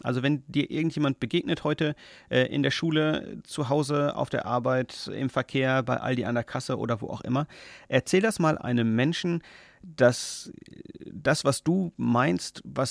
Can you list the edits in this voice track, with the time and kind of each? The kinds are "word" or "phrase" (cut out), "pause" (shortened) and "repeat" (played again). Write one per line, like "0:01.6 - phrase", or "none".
none